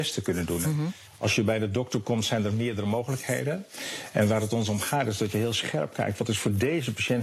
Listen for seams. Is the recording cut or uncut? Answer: uncut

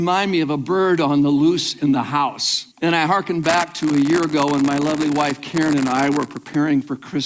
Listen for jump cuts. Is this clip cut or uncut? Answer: cut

